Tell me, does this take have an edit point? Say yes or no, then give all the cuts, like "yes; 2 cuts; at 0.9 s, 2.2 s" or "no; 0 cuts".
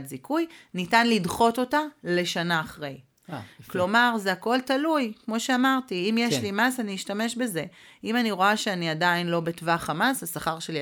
no; 0 cuts